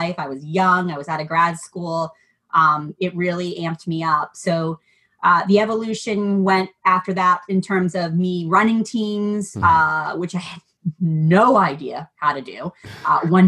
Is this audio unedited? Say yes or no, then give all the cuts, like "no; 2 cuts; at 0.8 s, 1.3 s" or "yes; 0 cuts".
yes; 0 cuts